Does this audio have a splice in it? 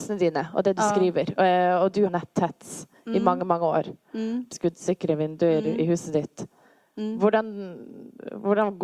yes; 2 cuts; at 2.1 s, 4.5 s

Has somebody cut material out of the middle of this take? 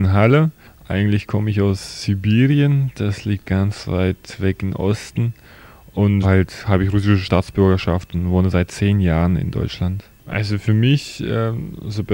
yes; 1 cut; at 6.2 s

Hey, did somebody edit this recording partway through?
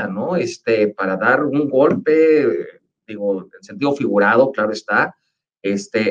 no; 0 cuts

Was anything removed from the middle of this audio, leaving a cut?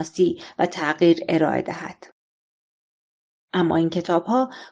no; 0 cuts

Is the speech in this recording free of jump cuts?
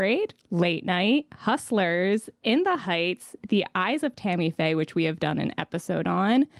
yes; 0 cuts

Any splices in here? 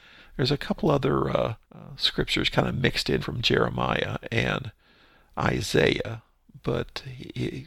yes; 2 cuts; at 1.6 s, 3.2 s

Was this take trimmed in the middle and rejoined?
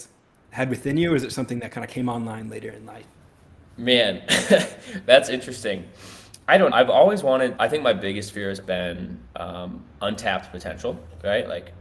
yes; 3 cuts; at 6.7 s, 7.6 s, 8.6 s

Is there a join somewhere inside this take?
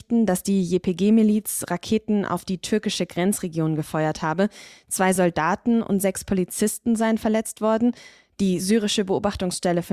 no; 0 cuts

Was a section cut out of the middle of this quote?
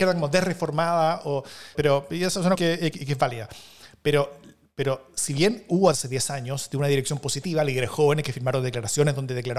yes; 4 cuts; at 1.7 s, 2.5 s, 2.9 s, 5.9 s

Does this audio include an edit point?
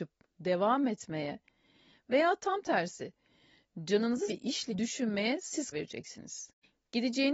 yes; 3 cuts; at 4.3 s, 4.7 s, 5.7 s

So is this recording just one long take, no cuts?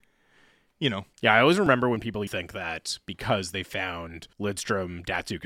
no; 3 cuts; at 1.1 s, 2.3 s, 4.3 s

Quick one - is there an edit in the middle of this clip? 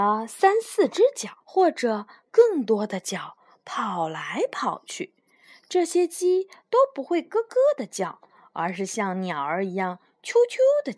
yes; 1 cut; at 1.4 s

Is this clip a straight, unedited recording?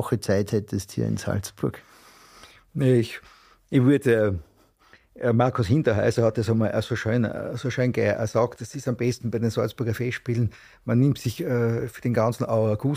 yes; 0 cuts

